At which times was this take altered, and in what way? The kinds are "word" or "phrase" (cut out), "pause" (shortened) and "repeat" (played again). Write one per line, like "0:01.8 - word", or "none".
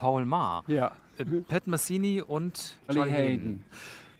0:02.9 - word